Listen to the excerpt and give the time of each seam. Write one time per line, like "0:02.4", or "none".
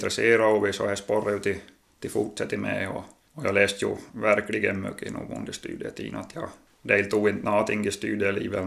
0:04.1